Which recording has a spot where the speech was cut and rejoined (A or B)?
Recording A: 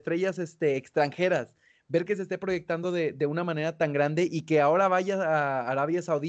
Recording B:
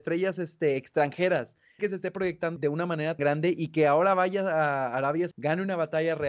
B